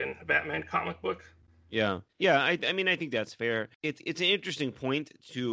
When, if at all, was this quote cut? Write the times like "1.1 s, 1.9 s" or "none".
2.1 s